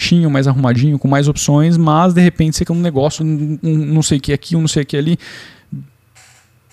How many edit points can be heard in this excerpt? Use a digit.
3